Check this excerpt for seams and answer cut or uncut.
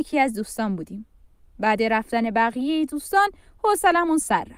uncut